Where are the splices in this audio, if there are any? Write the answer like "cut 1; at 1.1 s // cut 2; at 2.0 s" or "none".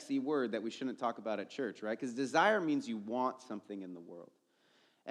none